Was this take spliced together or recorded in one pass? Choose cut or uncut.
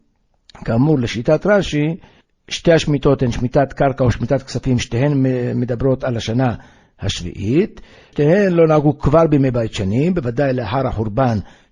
uncut